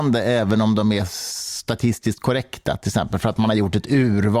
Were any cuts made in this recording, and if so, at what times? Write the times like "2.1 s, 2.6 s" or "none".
none